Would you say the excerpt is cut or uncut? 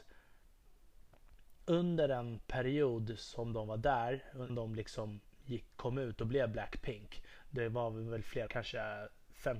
cut